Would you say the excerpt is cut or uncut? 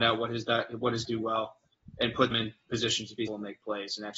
cut